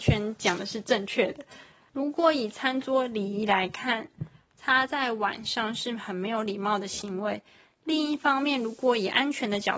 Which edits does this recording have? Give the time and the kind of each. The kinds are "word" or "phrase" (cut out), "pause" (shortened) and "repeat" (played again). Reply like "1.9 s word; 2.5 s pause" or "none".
none